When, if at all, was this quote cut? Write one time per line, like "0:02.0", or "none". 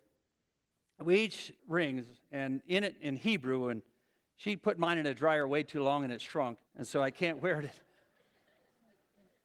0:01.6
0:06.7